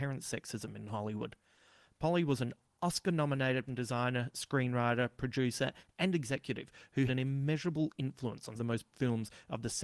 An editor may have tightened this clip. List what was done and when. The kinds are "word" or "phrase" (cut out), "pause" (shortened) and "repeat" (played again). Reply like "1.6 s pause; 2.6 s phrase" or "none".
3.7 s word; 7.1 s word; 8.6 s word; 8.9 s word